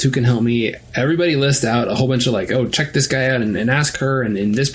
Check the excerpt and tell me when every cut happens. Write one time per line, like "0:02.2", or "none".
none